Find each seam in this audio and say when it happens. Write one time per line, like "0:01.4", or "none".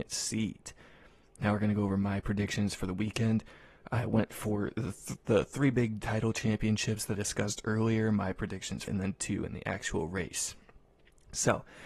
0:07.1
0:08.9